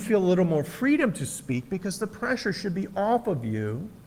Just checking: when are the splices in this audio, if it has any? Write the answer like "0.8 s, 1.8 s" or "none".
none